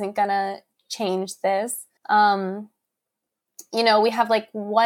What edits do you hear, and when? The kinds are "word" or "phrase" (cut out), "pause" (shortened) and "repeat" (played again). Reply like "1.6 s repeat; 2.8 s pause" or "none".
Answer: 2.0 s pause